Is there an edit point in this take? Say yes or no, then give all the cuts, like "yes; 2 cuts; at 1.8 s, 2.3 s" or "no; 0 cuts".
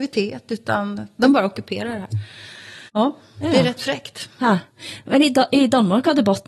yes; 1 cut; at 2.9 s